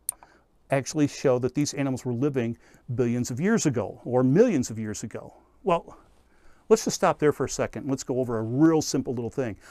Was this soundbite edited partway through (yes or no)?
no